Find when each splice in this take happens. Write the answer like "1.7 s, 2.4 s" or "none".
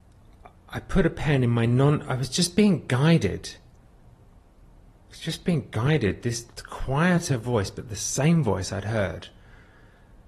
none